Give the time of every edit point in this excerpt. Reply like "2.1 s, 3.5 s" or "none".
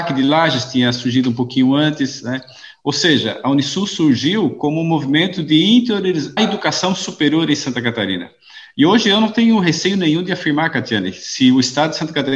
6.4 s